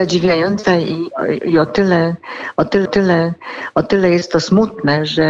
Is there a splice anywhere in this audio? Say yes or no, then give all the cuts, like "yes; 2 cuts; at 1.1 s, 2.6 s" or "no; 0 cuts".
yes; 1 cut; at 2.8 s